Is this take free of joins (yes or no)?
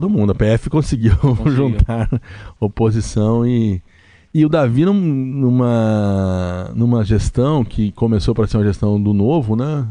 yes